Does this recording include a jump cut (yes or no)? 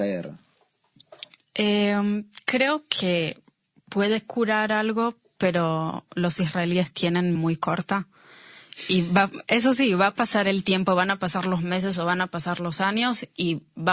yes